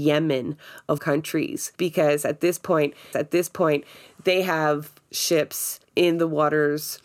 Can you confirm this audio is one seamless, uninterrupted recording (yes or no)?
no